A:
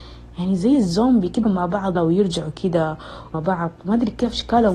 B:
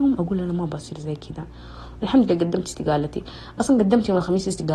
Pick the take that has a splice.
A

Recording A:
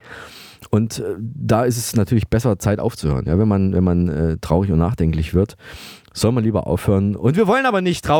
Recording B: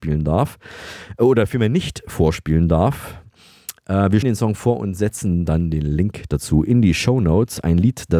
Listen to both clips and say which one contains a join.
B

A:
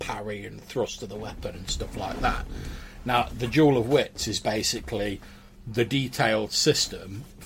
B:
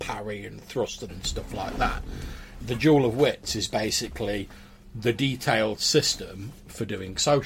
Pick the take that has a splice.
B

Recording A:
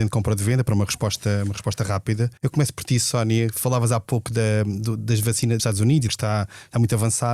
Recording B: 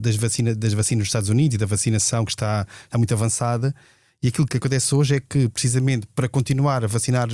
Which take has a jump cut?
A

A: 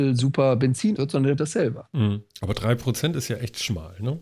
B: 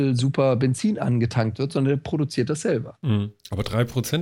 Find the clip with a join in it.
A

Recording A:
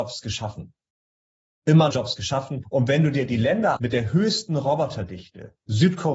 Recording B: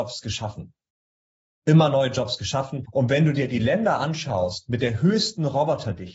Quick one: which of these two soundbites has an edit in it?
A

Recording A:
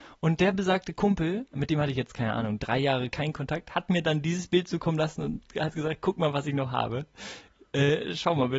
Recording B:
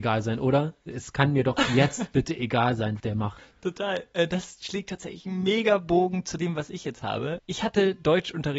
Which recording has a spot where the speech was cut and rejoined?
B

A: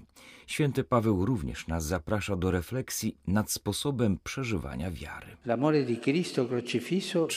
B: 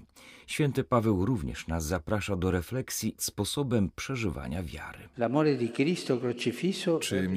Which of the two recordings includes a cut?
B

